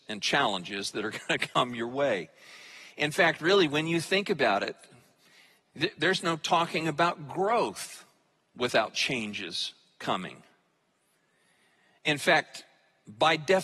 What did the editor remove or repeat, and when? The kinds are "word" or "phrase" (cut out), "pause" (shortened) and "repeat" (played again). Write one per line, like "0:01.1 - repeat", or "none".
none